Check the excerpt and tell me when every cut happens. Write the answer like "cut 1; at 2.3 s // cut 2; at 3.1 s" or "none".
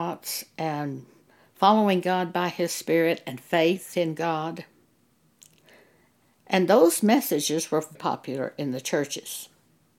cut 1; at 7.9 s

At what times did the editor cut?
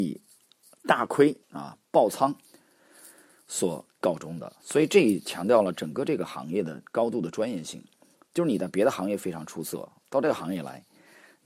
cut 1; at 1.4 s

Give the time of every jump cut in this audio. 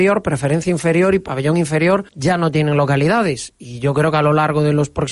cut 1; at 2.1 s

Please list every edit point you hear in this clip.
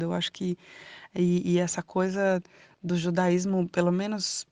none

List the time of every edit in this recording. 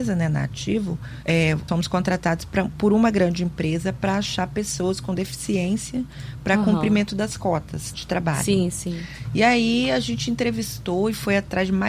cut 1; at 1.2 s // cut 2; at 1.7 s // cut 3; at 7.9 s

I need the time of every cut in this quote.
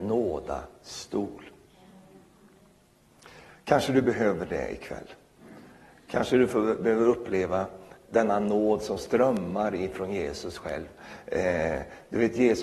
none

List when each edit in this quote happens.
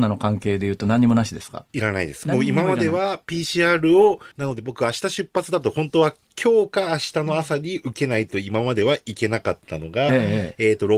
cut 1; at 4.3 s

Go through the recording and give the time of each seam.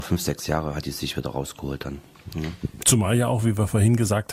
none

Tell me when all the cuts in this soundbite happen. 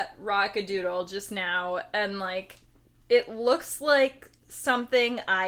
none

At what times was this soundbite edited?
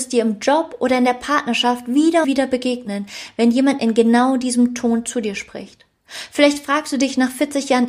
cut 1; at 2.2 s

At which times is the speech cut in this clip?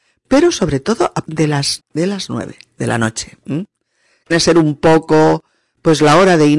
cut 1; at 1.2 s // cut 2; at 1.8 s // cut 3; at 4.3 s

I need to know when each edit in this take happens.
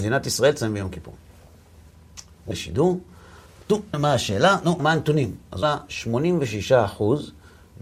cut 1; at 2.5 s // cut 2; at 3.9 s // cut 3; at 4.8 s // cut 4; at 5.6 s

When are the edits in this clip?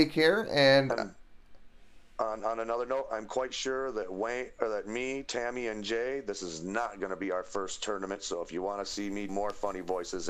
cut 1; at 9.3 s

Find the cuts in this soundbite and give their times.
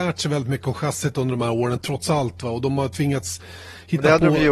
none

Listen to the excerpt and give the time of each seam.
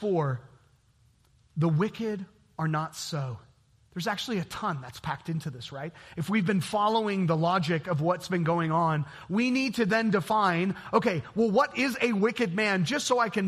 none

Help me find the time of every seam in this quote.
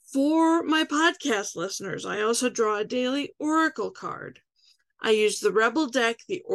none

